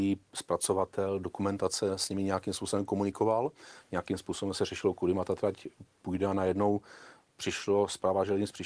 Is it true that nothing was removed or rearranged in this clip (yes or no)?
yes